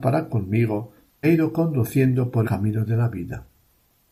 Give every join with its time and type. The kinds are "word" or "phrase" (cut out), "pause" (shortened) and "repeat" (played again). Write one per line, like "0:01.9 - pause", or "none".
0:01.2 - word
0:02.4 - word